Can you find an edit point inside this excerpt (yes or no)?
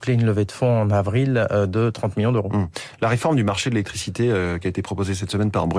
no